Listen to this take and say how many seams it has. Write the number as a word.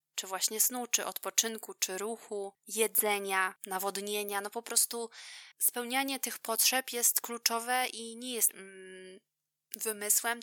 two